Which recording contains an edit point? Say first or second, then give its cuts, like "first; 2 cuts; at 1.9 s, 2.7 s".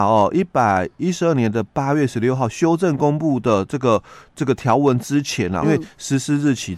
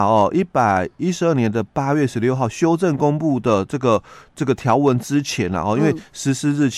first; 1 cut; at 5.6 s